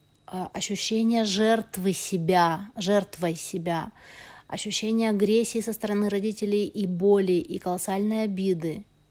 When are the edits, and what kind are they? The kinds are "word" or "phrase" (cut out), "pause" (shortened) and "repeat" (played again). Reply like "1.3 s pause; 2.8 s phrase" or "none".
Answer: none